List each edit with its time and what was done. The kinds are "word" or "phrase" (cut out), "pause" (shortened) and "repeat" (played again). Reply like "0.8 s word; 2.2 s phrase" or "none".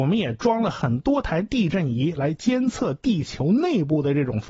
none

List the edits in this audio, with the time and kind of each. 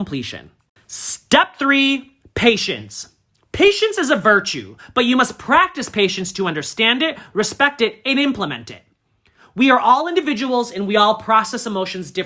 none

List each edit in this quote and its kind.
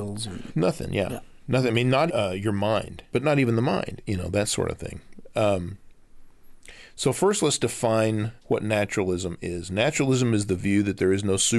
2.1 s word; 3.1 s phrase; 8.4 s pause

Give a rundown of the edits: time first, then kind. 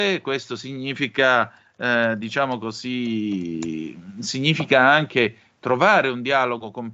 none

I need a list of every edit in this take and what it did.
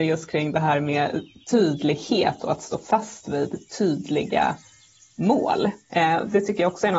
none

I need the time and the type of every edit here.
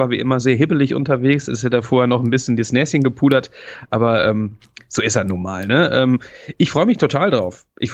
none

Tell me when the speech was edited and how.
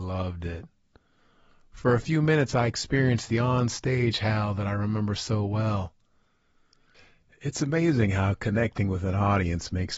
none

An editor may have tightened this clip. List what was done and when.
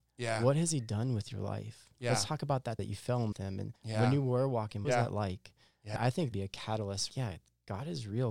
2.8 s word; 3.3 s phrase; 3.8 s pause; 4.8 s phrase; 6.0 s word; 6.3 s phrase; 7.1 s word

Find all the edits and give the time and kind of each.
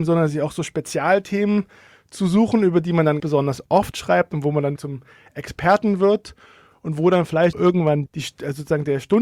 3.2 s word; 4.8 s word; 7.5 s word; 8.1 s word

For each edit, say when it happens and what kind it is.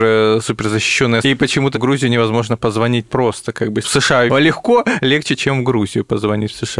1.2 s word; 1.7 s word; 3.1 s word; 3.8 s word; 4.3 s word

